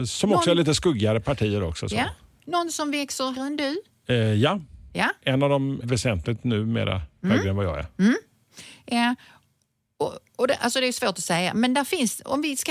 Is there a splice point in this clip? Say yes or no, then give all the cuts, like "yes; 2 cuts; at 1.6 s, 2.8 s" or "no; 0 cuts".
yes; 2 cuts; at 3.3 s, 5.8 s